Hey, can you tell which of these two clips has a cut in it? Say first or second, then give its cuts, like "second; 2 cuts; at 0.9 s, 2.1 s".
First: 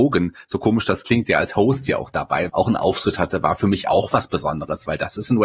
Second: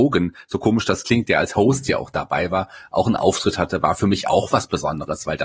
first; 1 cut; at 2.5 s